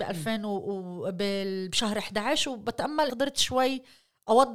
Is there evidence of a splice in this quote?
yes; 1 cut; at 3.1 s

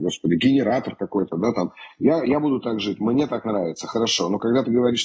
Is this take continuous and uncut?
yes; 0 cuts

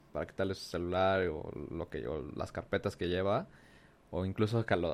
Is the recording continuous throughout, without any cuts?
yes; 0 cuts

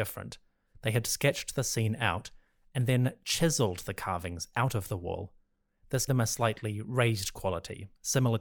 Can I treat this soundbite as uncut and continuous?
no; 1 cut; at 6.1 s

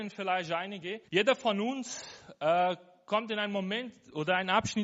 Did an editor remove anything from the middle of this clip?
yes; 1 cut; at 1.1 s

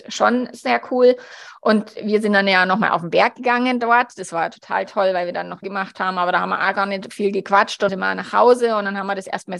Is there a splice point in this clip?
yes; 2 cuts; at 5.6 s, 7.9 s

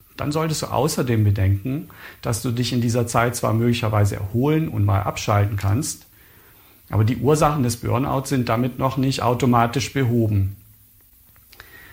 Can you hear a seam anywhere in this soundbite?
no; 0 cuts

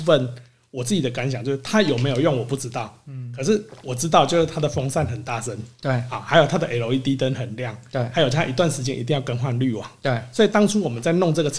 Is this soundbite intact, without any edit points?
yes; 0 cuts

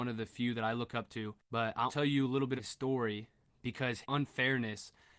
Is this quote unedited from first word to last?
no; 4 cuts; at 1.4 s, 1.9 s, 2.6 s, 4.0 s

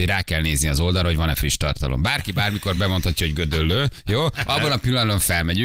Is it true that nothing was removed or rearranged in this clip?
yes; 0 cuts

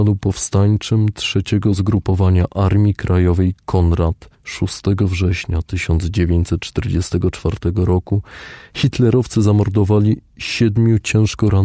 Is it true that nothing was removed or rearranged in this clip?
no; 1 cut; at 4.3 s

